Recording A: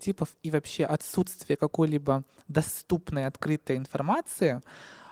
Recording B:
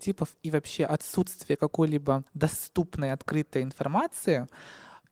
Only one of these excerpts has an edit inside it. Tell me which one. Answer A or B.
B